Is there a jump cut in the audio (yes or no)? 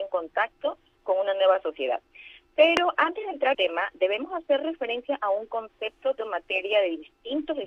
yes